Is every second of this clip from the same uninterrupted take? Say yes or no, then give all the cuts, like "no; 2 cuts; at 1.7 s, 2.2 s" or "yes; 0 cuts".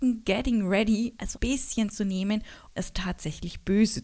no; 2 cuts; at 1.3 s, 2.8 s